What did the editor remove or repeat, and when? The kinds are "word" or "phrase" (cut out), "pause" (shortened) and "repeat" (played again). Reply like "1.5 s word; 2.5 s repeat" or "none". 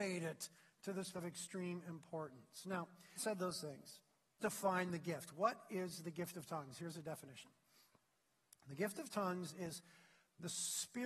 1.1 s word; 3.2 s word; 4.4 s word

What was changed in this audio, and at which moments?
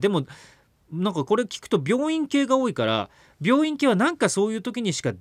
none

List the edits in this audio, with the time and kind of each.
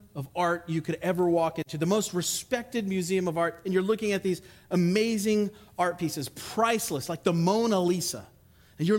none

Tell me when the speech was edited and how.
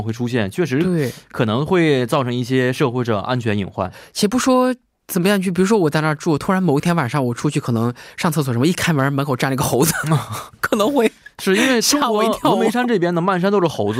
none

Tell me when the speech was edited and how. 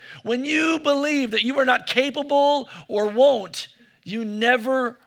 none

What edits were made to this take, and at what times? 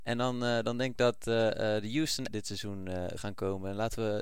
0.9 s word; 2.3 s word; 3.2 s word

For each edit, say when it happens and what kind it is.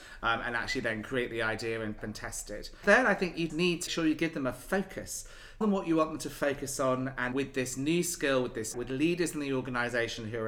2.0 s word; 3.5 s word; 3.9 s word; 5.6 s word; 7.3 s word; 8.7 s word

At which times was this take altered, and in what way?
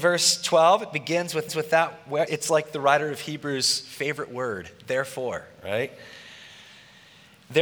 1.5 s repeat; 2.3 s word

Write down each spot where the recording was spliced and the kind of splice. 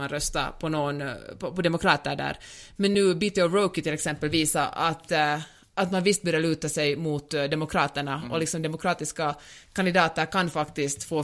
none

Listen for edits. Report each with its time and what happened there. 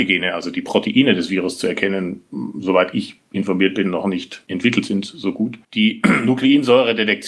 none

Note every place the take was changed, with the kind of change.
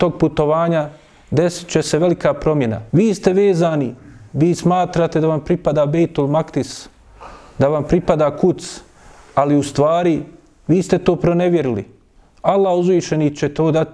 2.9 s pause

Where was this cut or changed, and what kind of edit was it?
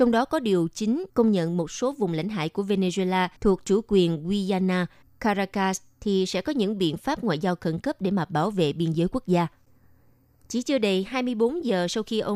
1.1 s pause; 3.4 s pause

